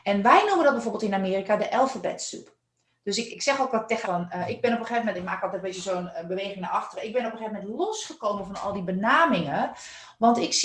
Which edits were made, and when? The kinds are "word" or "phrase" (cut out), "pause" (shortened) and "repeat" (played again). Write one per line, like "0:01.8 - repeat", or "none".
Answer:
0:03.3 - word
0:04.0 - word